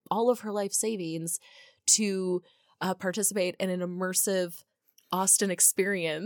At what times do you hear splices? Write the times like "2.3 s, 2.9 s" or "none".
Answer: none